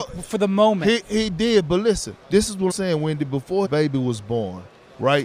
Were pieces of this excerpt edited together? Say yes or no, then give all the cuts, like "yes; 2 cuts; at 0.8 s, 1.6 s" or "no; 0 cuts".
yes; 3 cuts; at 2.2 s, 2.7 s, 3.6 s